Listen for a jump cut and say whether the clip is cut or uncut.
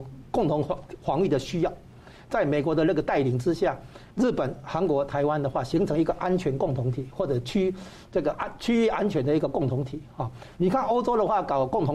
cut